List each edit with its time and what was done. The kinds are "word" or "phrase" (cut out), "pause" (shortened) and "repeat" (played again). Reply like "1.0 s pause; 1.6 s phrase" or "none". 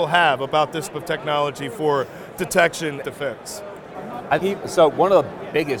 0.9 s word; 3.0 s phrase; 4.4 s word